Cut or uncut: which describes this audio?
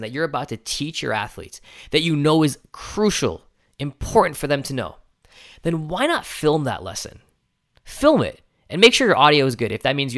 uncut